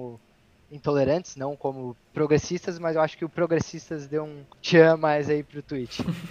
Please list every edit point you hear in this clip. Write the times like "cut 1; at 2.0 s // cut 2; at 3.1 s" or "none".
cut 1; at 2.0 s // cut 2; at 4.5 s